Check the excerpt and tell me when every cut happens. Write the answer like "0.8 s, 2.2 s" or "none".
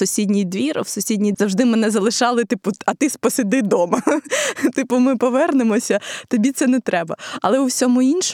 1.3 s